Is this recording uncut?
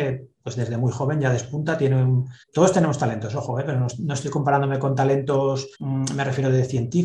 no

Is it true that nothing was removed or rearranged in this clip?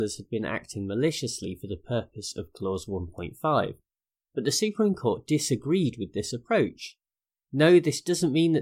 yes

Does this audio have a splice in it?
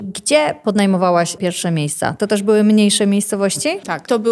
yes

